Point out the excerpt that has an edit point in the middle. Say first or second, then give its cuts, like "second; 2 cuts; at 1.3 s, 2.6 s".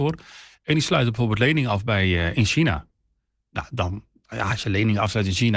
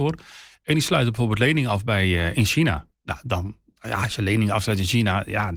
second; 1 cut; at 2.9 s